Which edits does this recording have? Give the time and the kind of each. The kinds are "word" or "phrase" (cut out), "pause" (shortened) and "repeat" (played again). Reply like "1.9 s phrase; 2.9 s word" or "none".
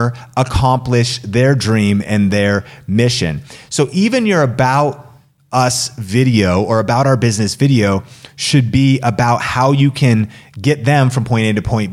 none